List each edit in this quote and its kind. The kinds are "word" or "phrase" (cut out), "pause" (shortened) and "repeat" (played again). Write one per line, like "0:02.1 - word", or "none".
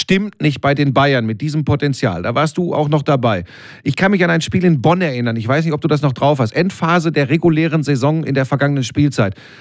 none